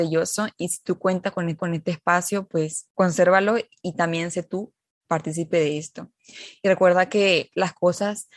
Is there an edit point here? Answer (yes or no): yes